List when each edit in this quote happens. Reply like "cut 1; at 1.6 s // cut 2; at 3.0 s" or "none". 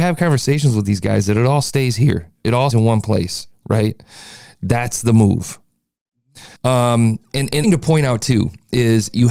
cut 1; at 2.7 s // cut 2; at 6.6 s // cut 3; at 7.6 s